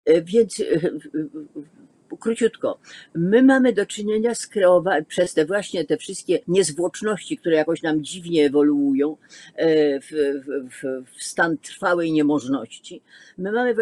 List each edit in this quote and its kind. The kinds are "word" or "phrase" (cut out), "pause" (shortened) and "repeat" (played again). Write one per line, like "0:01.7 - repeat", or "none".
0:06.4 - pause